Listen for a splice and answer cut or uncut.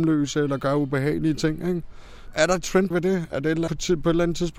cut